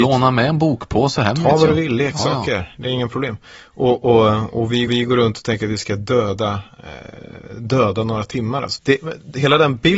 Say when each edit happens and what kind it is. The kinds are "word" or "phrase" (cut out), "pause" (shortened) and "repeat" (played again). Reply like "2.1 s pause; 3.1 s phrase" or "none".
4.9 s repeat; 8.8 s word